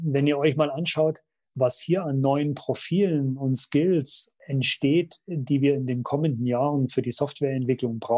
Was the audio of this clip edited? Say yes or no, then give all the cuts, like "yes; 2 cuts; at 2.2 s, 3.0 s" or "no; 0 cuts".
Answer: no; 0 cuts